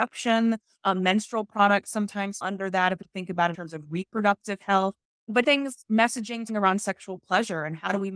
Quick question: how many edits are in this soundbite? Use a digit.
5